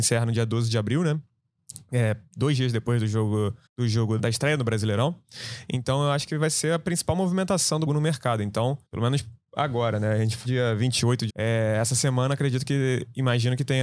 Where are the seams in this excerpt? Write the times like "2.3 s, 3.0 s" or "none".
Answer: 3.7 s, 4.2 s, 7.9 s, 8.9 s, 10.4 s, 11.3 s